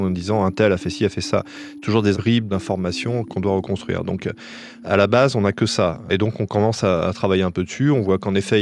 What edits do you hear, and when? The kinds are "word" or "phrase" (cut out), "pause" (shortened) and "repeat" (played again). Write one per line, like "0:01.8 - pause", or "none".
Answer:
0:02.1 - phrase